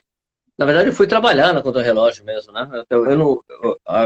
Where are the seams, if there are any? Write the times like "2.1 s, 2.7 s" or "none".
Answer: 3.1 s